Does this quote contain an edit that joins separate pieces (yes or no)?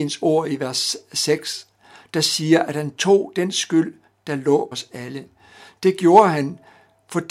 yes